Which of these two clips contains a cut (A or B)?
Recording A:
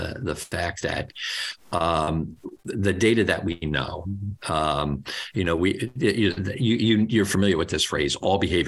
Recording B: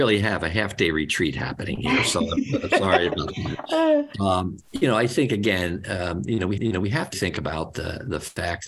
B